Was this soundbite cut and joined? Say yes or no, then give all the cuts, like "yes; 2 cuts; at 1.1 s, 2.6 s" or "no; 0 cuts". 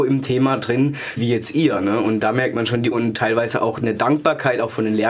yes; 2 cuts; at 1.2 s, 2.9 s